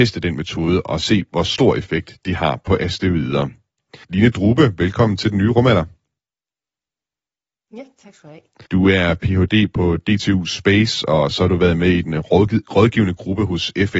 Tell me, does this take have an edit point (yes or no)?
yes